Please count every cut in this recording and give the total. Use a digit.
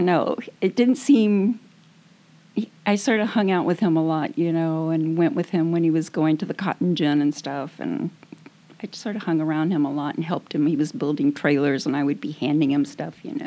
0